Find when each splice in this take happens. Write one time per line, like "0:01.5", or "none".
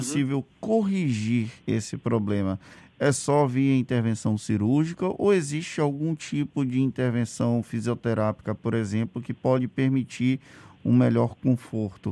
0:01.6